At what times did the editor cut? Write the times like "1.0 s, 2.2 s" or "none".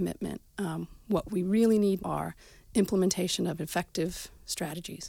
2.0 s